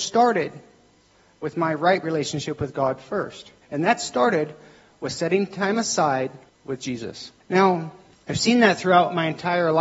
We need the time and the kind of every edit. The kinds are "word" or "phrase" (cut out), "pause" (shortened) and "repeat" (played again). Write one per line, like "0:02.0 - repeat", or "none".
0:03.6 - pause
0:07.4 - pause